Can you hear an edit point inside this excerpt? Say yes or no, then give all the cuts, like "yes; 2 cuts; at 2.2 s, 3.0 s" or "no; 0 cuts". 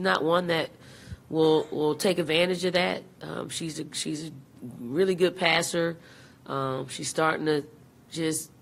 no; 0 cuts